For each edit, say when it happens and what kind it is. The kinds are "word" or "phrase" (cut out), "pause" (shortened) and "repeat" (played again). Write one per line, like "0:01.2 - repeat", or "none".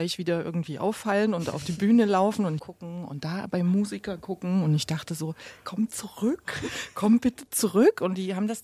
0:02.6 - phrase